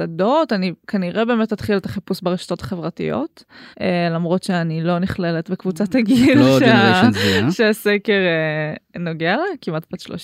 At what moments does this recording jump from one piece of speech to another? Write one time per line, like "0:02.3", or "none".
0:03.7